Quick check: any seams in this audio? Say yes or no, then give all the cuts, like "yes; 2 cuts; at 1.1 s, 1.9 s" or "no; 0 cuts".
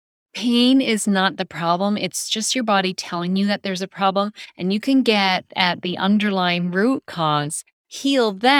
no; 0 cuts